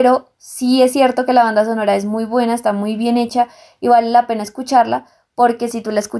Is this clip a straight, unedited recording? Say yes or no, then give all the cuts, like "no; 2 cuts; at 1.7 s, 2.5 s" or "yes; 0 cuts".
yes; 0 cuts